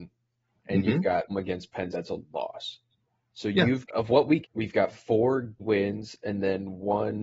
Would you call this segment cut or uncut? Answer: cut